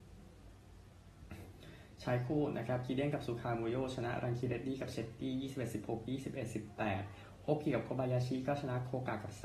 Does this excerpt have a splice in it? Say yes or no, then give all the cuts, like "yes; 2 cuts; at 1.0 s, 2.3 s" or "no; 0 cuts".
no; 0 cuts